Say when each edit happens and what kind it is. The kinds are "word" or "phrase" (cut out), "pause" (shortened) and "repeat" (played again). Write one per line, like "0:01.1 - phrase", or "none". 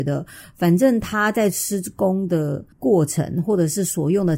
0:02.7 - pause